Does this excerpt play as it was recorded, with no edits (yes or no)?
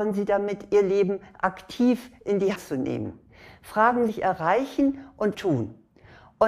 no